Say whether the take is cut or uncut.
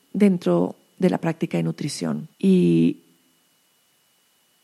cut